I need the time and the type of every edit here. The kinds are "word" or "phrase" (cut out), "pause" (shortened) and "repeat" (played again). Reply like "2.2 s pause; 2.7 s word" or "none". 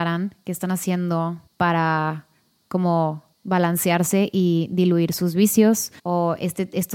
1.5 s pause; 3.3 s pause; 6.0 s pause